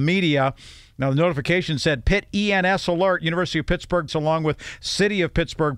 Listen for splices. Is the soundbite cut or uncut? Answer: cut